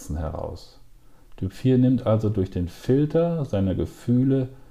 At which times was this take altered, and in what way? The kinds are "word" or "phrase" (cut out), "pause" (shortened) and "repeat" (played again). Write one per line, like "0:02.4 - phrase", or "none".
none